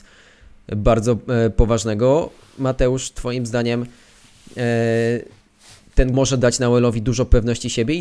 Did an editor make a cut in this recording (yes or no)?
yes